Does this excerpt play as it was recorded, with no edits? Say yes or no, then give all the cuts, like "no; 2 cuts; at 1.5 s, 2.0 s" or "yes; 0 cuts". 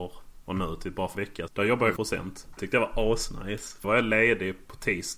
no; 5 cuts; at 1.1 s, 1.5 s, 2.0 s, 2.6 s, 3.8 s